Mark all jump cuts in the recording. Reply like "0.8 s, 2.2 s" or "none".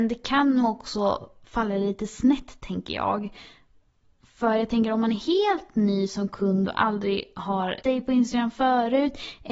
7.8 s